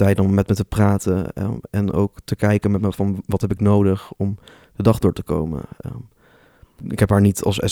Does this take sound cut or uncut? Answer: uncut